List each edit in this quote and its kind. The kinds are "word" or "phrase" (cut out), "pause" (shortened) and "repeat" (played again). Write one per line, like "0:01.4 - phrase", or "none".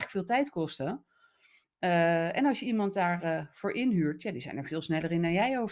none

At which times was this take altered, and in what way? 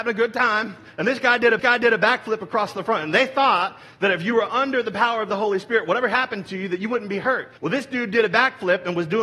0:01.6 - repeat
0:07.6 - pause

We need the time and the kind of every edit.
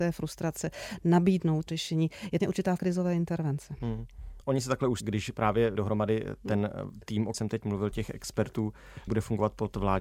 0:01.7 - word
0:02.4 - word
0:02.8 - word
0:05.0 - word
0:05.8 - word
0:07.3 - word
0:07.9 - word
0:09.1 - word

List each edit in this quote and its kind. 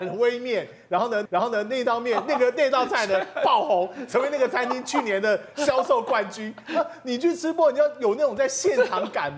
0:01.3 - repeat

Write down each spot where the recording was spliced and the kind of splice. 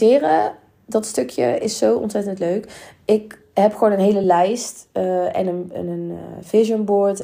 none

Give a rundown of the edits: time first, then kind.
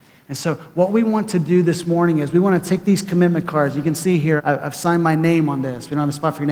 0:04.4 - word

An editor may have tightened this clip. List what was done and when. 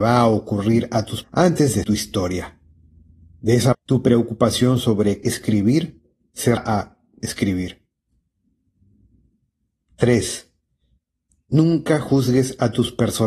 0:01.2 - word
0:01.8 - word
0:03.7 - word
0:05.2 - word
0:06.6 - word
0:07.2 - word

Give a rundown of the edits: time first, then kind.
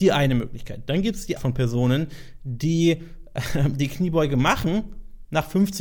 0:01.4 - phrase

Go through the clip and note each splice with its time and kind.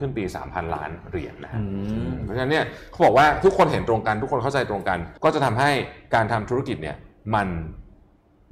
0:05.2 - pause

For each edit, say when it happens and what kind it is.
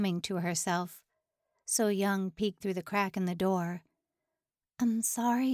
0:02.6 - word

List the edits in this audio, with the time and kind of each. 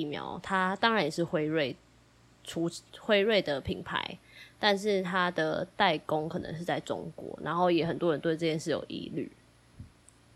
0:02.9 - word

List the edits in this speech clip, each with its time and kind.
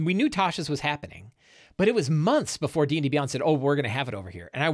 none

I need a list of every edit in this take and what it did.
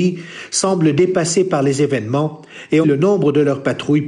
0:02.8 - word

